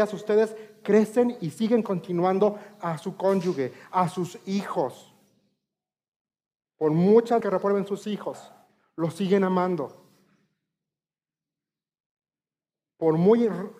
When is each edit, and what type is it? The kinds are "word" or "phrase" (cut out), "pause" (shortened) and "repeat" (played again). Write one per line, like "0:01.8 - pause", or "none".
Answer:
0:07.4 - word